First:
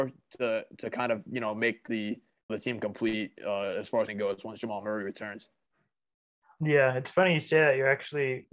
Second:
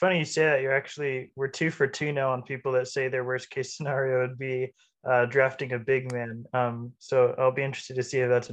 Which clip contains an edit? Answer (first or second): first